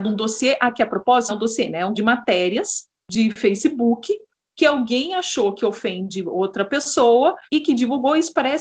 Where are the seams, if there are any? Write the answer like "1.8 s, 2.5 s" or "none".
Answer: 1.3 s, 1.9 s, 3.0 s, 7.5 s